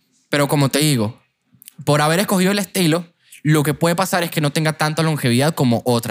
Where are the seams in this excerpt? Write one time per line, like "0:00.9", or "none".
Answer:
none